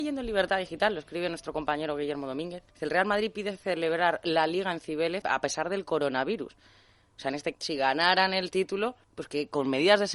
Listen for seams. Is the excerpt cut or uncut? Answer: cut